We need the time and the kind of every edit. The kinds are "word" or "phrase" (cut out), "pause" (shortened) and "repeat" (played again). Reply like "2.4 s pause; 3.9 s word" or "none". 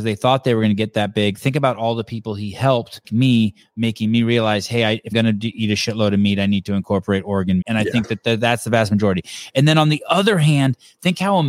3.0 s word; 5.1 s word; 7.6 s word